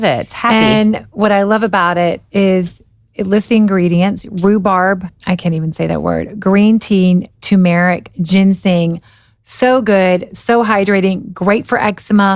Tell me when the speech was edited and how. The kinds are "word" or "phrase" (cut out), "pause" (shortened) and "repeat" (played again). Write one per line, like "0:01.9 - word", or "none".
none